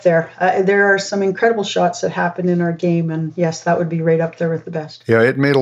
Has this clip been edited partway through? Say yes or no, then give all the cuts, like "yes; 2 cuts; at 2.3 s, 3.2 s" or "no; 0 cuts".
no; 0 cuts